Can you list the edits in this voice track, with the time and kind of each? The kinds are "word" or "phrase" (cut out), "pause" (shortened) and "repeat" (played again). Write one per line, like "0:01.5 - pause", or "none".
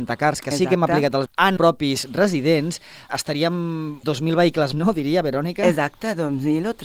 0:01.3 - word
0:01.6 - word
0:03.1 - word
0:04.0 - word
0:04.7 - word